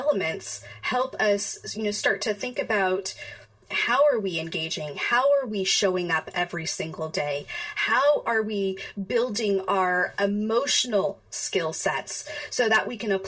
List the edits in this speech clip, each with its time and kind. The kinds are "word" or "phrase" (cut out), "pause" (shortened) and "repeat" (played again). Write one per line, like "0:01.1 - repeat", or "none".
none

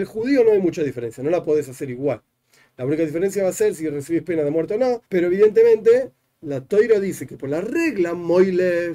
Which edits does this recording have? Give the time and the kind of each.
0:05.0 - pause

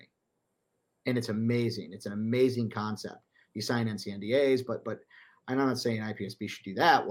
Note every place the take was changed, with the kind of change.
none

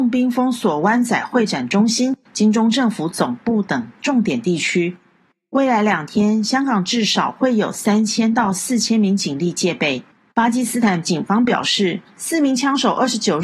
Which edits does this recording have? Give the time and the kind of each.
0:10.1 - pause

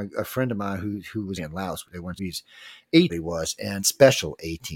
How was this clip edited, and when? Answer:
0:01.4 - word
0:01.8 - word
0:02.2 - word
0:03.1 - phrase
0:03.8 - word

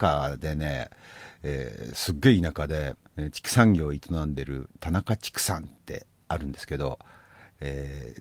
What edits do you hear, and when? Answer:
0:03.0 - pause

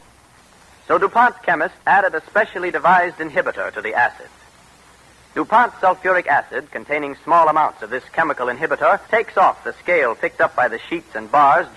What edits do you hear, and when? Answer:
0:01.8 - pause
0:09.1 - pause

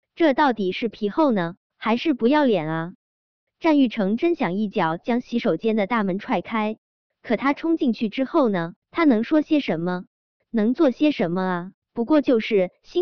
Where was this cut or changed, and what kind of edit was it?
0:01.7 - pause
0:08.8 - pause
0:11.8 - pause

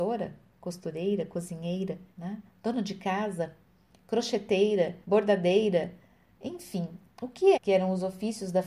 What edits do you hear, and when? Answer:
0:02.1 - pause
0:05.0 - pause
0:07.5 - word

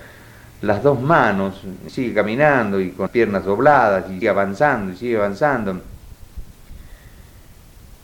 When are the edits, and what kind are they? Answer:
0:01.9 - word
0:03.1 - word
0:04.2 - word

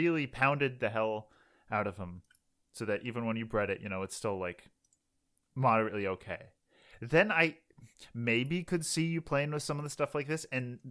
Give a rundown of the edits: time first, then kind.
none

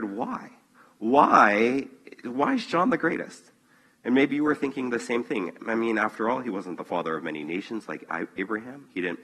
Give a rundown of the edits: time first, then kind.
none

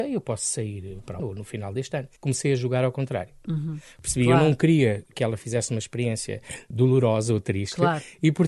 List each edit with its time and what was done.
0:01.2 - word
0:02.2 - pause
0:05.1 - word

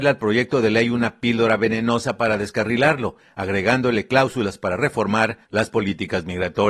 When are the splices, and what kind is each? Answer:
0:05.4 - pause

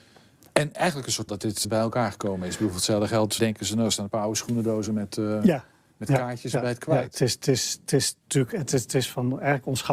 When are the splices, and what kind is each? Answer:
0:01.3 - word
0:01.6 - word
0:03.4 - word

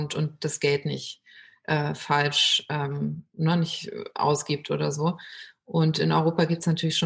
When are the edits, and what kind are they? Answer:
none

